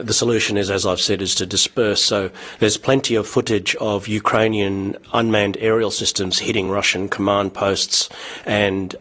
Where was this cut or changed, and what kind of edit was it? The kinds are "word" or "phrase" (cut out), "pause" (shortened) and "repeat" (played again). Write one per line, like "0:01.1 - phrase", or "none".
none